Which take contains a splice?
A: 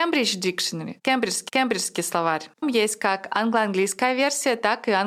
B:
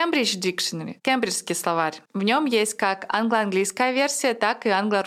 A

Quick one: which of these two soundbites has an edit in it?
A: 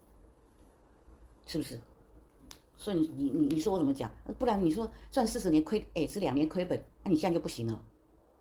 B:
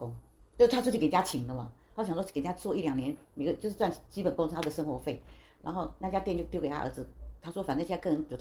A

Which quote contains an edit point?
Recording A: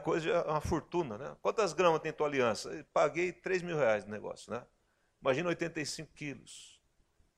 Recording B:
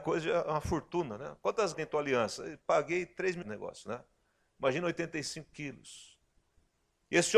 B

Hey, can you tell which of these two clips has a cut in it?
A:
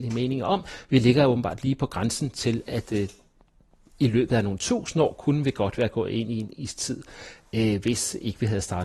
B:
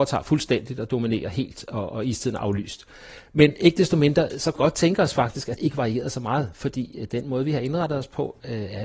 B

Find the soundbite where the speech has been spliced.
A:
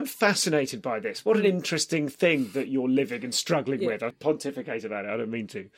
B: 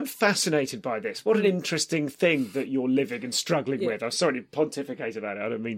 A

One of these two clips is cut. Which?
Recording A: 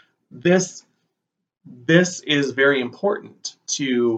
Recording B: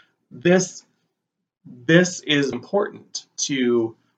B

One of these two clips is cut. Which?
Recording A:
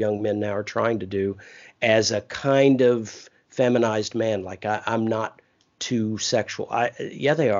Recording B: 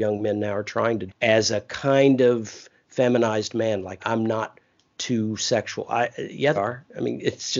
B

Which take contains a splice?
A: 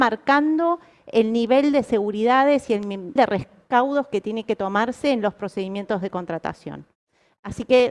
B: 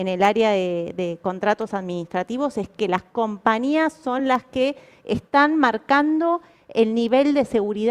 A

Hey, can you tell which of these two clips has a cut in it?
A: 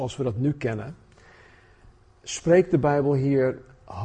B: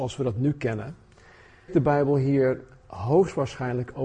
B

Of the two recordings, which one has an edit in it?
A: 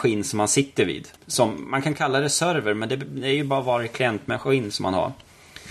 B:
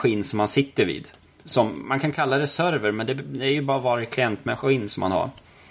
A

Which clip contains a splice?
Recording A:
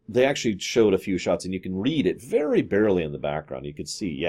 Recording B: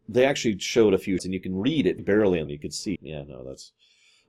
B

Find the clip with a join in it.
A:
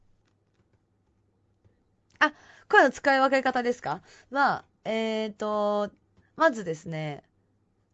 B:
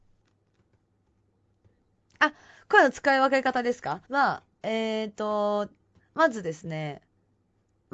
B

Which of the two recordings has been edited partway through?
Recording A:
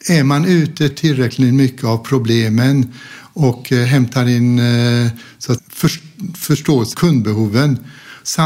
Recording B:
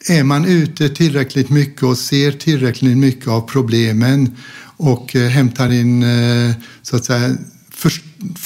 A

